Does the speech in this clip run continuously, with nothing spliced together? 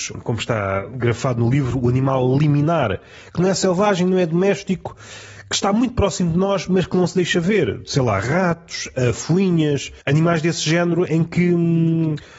no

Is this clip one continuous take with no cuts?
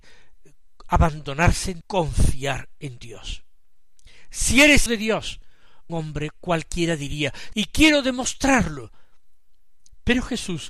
no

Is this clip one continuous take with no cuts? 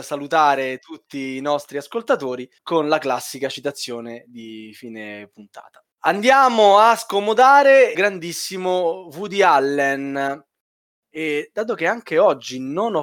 no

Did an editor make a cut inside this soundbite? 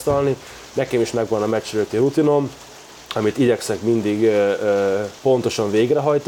no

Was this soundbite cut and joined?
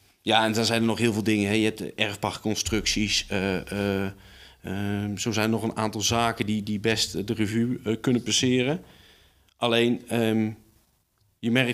no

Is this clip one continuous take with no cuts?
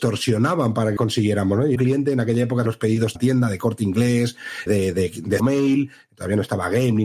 no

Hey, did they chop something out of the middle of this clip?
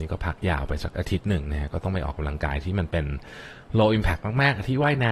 no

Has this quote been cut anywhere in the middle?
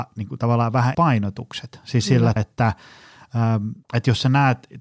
yes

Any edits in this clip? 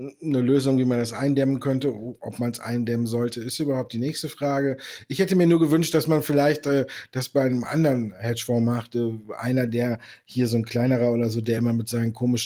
no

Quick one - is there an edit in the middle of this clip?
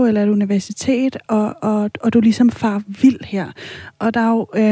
no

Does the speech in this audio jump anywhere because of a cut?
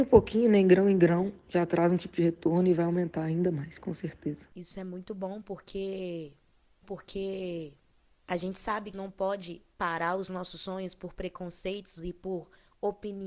yes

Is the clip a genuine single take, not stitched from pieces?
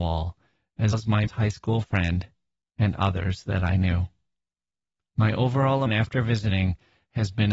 no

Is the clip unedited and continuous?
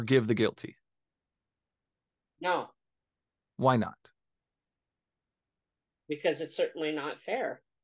yes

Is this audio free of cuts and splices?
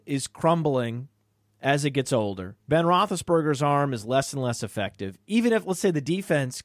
no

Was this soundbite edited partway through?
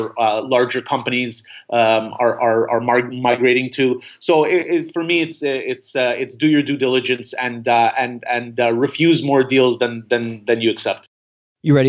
no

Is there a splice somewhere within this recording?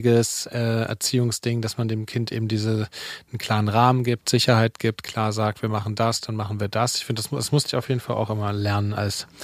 no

